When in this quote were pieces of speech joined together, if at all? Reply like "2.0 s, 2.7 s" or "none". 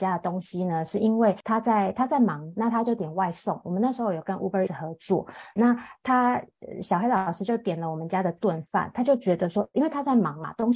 4.7 s, 5.6 s